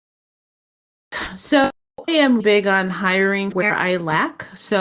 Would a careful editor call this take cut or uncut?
cut